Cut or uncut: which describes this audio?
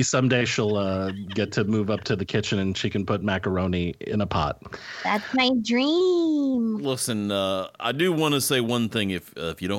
uncut